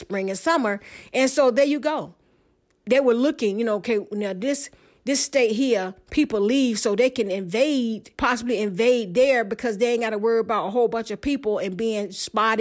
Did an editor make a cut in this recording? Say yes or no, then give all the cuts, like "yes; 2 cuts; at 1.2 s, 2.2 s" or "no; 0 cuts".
yes; 1 cut; at 8.1 s